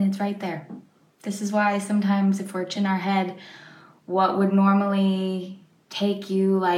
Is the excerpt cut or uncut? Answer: cut